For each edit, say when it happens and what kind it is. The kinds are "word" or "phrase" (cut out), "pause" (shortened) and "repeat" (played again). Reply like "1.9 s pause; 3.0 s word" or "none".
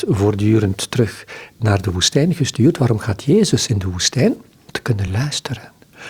none